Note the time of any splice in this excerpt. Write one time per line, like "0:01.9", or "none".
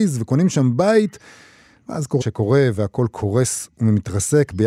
0:02.2